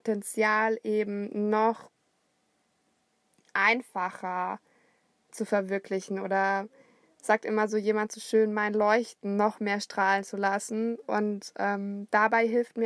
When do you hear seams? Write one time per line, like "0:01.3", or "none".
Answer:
none